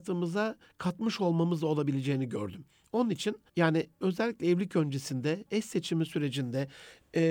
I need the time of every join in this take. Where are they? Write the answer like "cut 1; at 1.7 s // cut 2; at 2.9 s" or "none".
cut 1; at 3.5 s